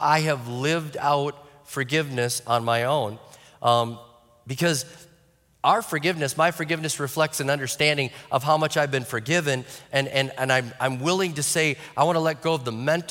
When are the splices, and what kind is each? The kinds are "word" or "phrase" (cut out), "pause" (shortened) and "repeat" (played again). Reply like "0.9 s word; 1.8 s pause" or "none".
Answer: none